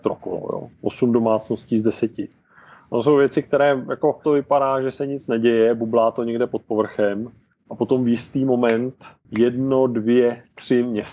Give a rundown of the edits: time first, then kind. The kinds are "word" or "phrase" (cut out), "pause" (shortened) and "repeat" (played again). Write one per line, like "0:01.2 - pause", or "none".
0:04.2 - phrase

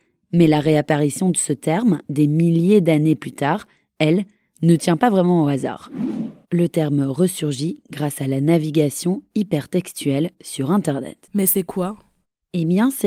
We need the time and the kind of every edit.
none

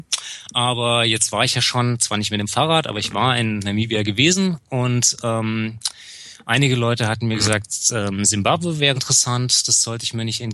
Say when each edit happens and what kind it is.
0:09.0 - word

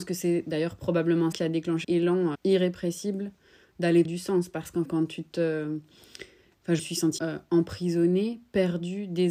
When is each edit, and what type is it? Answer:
0:01.3 - word
0:01.8 - word
0:02.3 - word
0:04.0 - word
0:04.8 - word
0:06.8 - word
0:07.2 - word

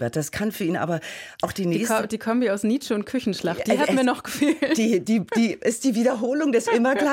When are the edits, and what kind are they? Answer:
none

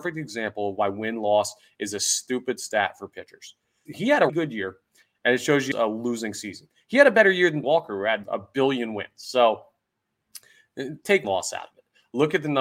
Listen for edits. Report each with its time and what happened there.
0:03.9 - word
0:04.3 - word
0:05.7 - word
0:07.6 - word
0:08.2 - word
0:11.2 - word

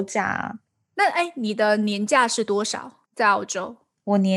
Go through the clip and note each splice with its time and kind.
0:03.1 - pause

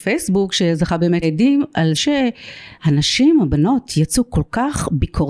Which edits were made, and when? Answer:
0:01.2 - word
0:01.9 - word
0:02.7 - pause

